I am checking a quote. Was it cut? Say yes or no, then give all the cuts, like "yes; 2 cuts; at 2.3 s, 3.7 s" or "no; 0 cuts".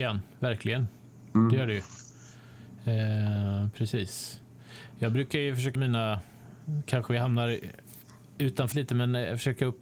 yes; 2 cuts; at 5.7 s, 8.7 s